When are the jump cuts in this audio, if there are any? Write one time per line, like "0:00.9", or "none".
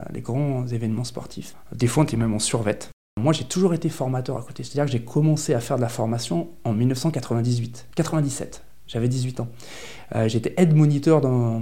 none